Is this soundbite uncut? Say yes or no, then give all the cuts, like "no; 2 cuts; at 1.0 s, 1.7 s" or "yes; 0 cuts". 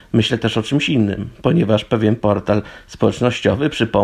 yes; 0 cuts